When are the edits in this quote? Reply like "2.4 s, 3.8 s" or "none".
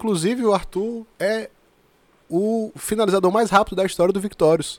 none